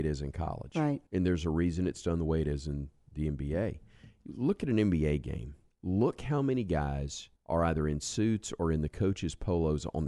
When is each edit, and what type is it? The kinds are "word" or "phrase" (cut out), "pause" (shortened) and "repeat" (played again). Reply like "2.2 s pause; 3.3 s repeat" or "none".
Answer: 1.1 s pause; 5.7 s pause; 7.4 s pause